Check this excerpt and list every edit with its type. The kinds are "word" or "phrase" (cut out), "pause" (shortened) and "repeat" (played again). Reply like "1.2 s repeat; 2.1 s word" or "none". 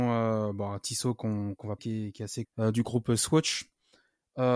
1.8 s word; 2.4 s word